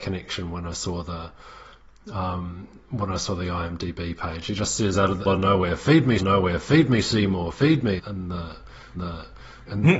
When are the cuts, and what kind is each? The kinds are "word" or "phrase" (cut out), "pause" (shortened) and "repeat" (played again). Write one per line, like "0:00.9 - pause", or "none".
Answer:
0:05.3 - phrase
0:06.2 - repeat
0:08.0 - word
0:09.0 - repeat